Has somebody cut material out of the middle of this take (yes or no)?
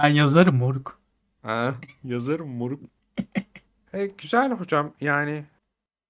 yes